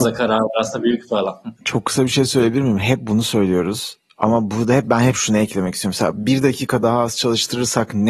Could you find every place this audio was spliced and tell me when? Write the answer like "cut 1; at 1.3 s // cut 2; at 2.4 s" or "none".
cut 1; at 1.5 s

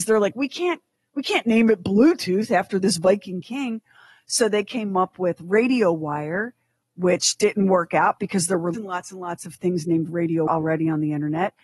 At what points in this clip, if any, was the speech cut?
cut 1; at 8.7 s // cut 2; at 10.5 s

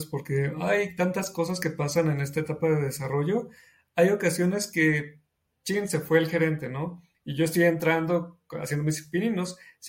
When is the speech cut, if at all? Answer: none

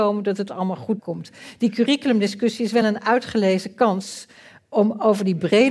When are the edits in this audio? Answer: none

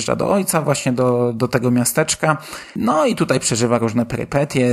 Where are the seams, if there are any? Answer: none

